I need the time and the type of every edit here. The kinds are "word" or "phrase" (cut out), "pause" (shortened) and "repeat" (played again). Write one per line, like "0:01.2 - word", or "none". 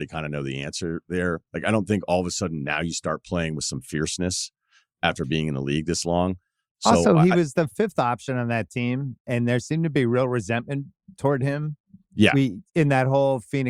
0:12.0 - pause